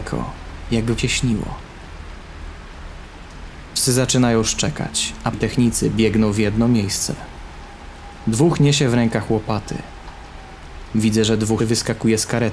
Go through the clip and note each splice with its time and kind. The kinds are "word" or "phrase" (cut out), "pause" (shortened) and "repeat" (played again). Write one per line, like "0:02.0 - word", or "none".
0:01.0 - phrase
0:05.3 - word
0:11.6 - word